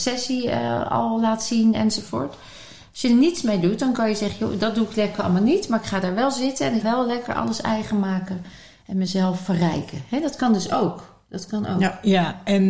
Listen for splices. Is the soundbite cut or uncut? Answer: cut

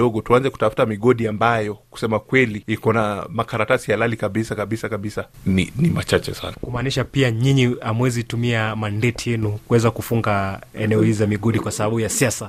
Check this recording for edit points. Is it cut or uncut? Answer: uncut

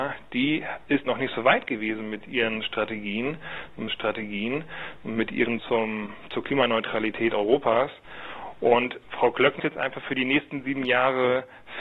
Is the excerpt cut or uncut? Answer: cut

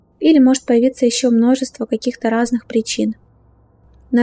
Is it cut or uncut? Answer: uncut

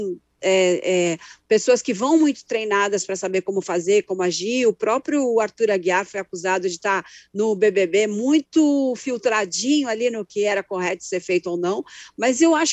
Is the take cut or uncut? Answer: uncut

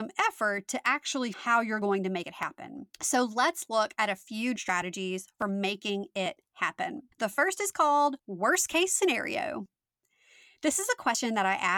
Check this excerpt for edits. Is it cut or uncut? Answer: cut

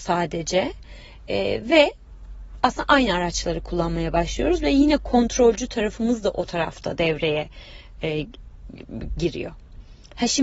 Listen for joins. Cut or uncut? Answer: uncut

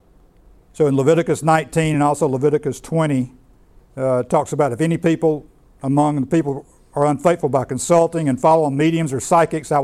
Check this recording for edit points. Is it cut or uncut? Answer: uncut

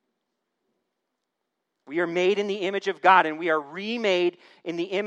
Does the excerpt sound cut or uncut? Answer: uncut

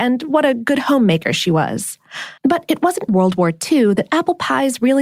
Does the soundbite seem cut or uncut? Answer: cut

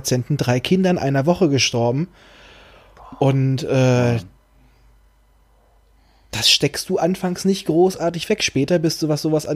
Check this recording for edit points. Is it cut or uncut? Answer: uncut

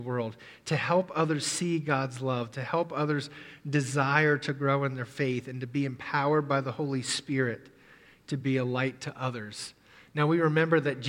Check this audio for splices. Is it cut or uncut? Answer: uncut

